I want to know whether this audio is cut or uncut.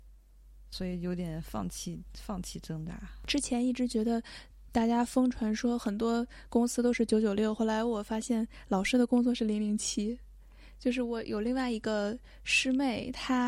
uncut